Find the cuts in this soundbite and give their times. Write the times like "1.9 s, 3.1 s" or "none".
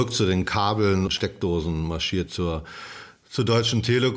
1.1 s, 2.3 s